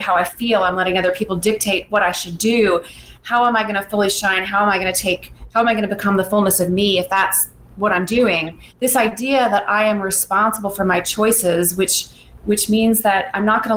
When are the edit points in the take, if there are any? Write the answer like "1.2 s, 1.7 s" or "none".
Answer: 8.7 s